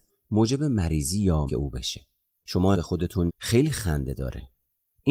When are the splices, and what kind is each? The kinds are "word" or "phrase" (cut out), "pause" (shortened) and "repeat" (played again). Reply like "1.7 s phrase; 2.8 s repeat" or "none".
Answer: 1.5 s word; 2.4 s word; 2.7 s word; 3.3 s word